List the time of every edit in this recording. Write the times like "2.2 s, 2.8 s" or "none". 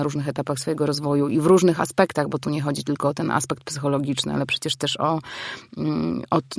none